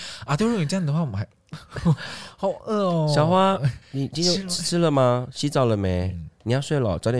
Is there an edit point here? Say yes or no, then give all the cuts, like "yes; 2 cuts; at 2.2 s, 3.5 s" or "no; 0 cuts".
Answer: yes; 1 cut; at 3.8 s